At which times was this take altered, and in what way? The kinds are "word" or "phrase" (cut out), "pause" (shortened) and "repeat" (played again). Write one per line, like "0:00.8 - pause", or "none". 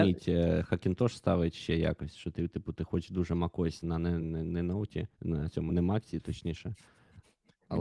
0:03.8 - word
0:04.2 - word
0:05.1 - pause
0:05.7 - word